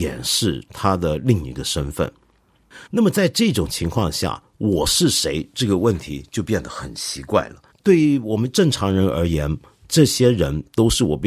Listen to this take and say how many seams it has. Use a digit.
2